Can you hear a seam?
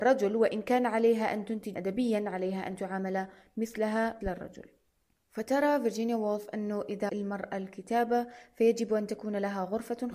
yes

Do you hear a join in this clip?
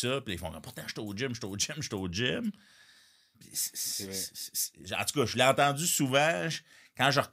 no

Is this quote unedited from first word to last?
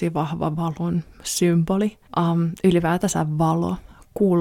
no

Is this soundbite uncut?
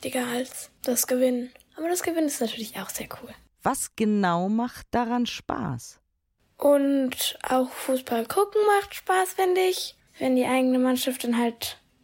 yes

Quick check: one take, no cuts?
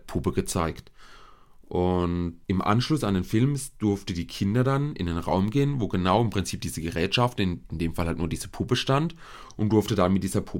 no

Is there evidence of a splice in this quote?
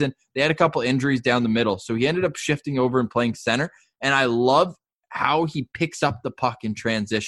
no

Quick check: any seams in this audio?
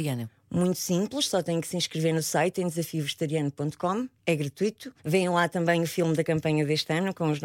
yes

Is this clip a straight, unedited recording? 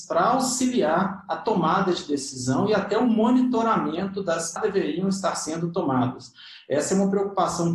no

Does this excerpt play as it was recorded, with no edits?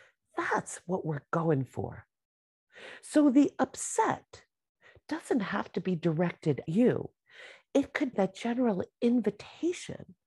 no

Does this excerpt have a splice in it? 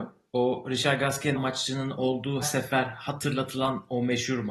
yes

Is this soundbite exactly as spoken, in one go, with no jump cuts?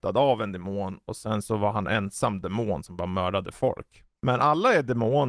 yes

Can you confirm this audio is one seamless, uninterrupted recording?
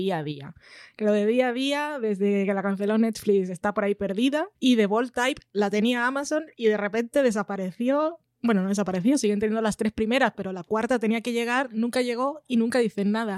no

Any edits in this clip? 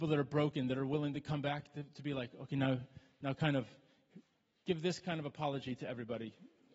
no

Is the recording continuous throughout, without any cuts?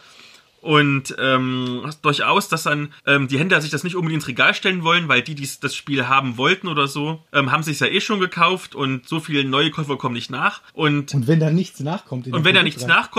no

